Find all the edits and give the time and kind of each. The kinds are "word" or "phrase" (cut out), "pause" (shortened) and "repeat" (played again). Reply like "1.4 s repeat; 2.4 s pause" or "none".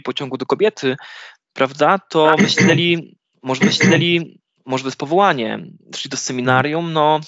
3.6 s repeat